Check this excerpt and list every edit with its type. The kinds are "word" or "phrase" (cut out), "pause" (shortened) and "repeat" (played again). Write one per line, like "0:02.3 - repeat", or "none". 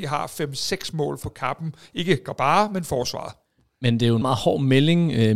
0:01.2 - word
0:04.2 - word

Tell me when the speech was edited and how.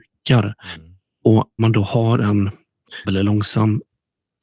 0:01.6 - word
0:03.0 - word

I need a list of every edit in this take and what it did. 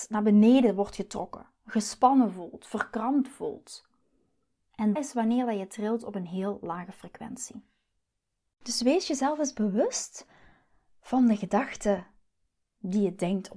0:05.0 - word

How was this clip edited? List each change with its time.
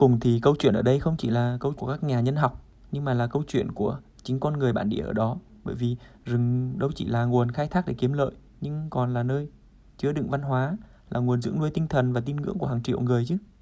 0:01.8 - word

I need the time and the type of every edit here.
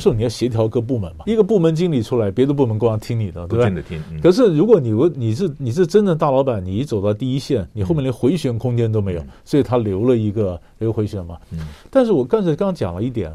0:01.3 - word

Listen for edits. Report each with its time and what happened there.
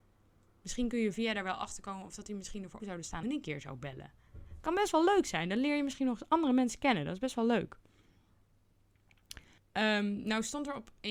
0:01.1 - word
0:02.8 - word
0:03.2 - phrase
0:09.6 - pause

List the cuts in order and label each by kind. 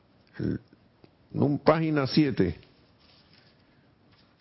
none

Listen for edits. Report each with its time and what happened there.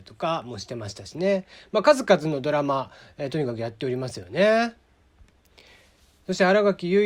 none

